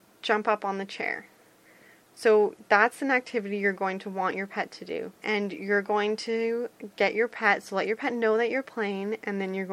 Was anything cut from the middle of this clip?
yes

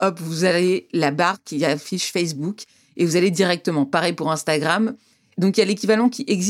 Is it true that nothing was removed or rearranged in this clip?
yes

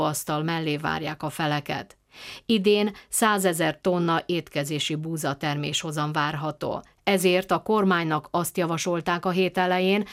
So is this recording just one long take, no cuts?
yes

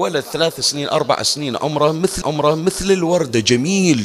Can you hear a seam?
yes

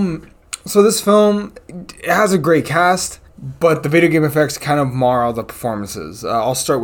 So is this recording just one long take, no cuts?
no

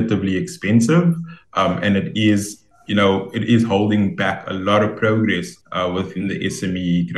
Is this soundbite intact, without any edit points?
no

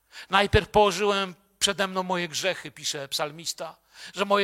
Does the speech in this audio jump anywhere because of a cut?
no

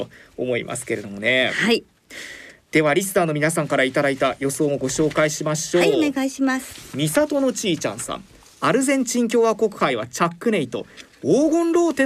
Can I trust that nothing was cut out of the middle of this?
yes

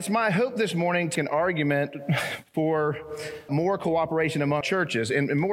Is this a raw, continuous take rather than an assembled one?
no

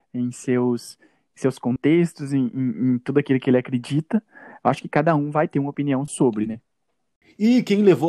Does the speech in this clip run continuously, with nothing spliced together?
yes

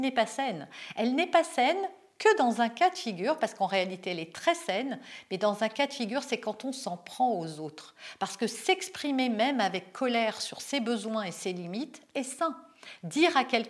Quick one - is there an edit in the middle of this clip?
no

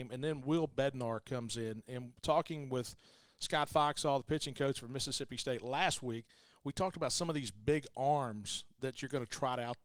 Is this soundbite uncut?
yes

